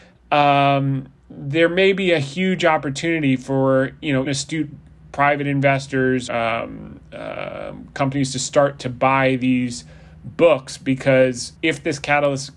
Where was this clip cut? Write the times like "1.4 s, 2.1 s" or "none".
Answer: 4.3 s, 6.3 s, 11.5 s